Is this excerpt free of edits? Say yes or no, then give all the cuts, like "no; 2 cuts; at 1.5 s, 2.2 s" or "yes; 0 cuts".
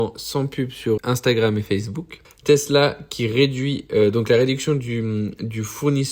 no; 2 cuts; at 1.0 s, 2.2 s